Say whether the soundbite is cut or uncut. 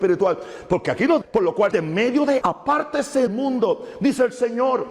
cut